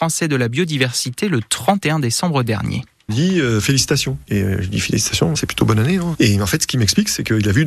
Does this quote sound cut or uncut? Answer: cut